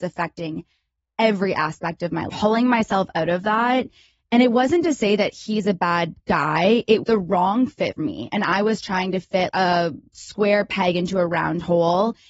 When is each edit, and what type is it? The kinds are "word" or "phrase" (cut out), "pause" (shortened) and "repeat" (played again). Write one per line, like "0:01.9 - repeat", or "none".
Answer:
0:02.3 - phrase
0:07.0 - word
0:08.0 - word
0:09.5 - word